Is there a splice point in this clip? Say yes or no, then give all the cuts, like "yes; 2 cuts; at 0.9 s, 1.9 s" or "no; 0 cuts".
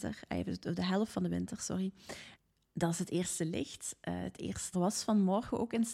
yes; 1 cut; at 4.7 s